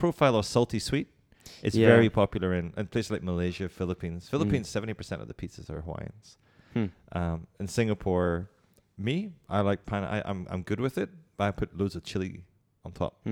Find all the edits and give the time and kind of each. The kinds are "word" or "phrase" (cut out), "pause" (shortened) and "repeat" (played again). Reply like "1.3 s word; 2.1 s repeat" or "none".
none